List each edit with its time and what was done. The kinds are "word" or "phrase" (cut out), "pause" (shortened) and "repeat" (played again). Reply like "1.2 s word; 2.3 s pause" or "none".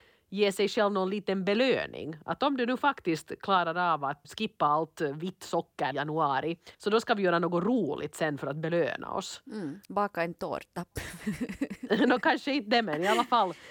4.2 s word; 5.9 s word; 6.7 s pause; 9.8 s pause